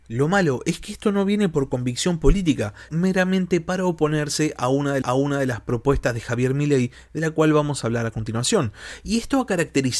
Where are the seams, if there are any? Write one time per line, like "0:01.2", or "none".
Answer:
0:02.9
0:05.0